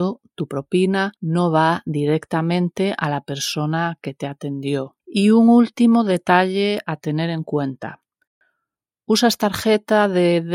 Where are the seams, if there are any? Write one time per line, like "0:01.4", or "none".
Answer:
0:01.2
0:05.0

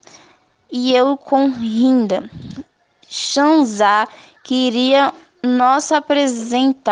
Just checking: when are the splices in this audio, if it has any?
none

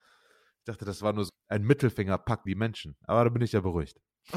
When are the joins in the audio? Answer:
0:01.3
0:02.5

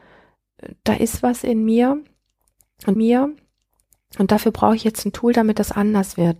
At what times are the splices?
0:03.0

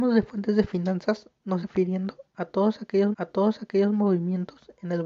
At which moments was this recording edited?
0:01.6
0:03.1

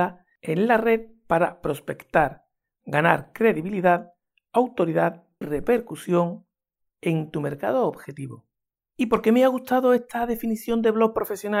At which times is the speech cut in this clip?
0:05.4

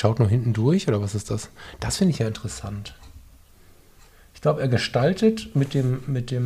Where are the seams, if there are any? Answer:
none

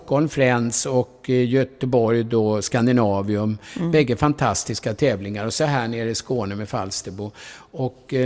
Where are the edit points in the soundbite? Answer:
none

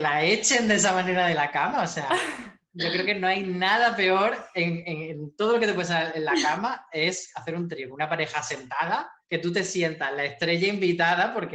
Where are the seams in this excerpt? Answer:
0:09.2

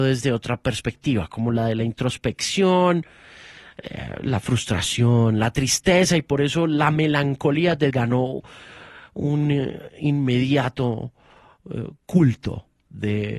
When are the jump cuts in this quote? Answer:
0:07.9

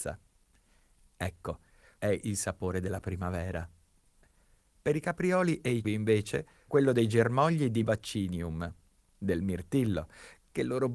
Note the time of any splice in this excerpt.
0:02.0
0:05.8
0:06.7
0:07.8

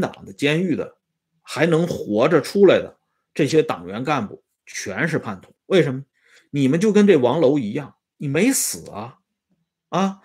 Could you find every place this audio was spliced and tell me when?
0:05.6

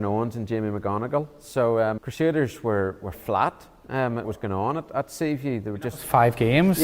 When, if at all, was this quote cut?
0:02.0
0:03.1
0:04.2

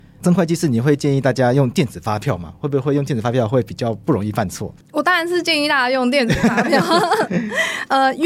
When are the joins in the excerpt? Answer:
0:04.8

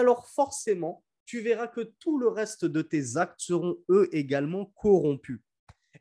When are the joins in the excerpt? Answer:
none

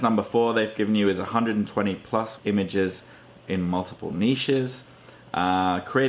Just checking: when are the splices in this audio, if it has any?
0:02.4

